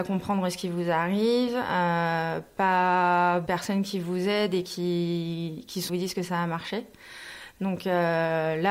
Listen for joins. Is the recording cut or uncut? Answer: cut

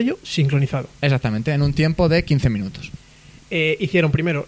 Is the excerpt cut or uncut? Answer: cut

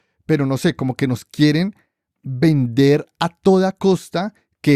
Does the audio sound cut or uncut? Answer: uncut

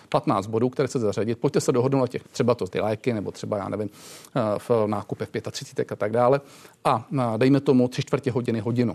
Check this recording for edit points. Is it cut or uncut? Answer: cut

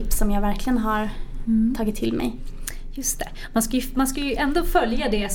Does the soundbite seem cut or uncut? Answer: uncut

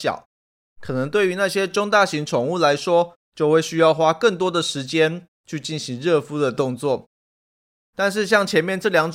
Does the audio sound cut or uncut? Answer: uncut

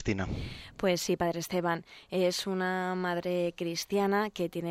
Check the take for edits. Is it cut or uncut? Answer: uncut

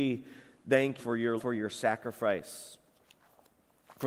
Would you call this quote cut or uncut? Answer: cut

